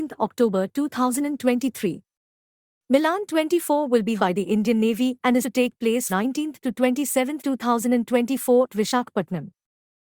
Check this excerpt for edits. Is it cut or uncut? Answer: cut